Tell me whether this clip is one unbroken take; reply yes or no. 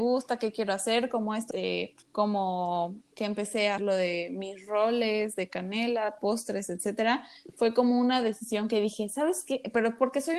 no